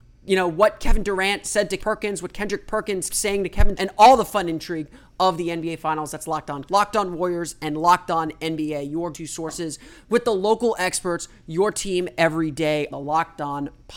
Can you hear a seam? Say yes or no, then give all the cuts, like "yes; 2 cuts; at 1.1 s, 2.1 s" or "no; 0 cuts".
yes; 6 cuts; at 1.8 s, 3.1 s, 3.7 s, 6.7 s, 9.1 s, 12.9 s